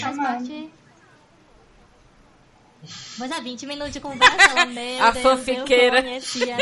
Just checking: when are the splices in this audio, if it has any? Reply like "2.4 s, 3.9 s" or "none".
none